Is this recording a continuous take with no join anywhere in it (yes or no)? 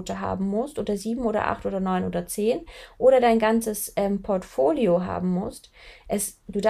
yes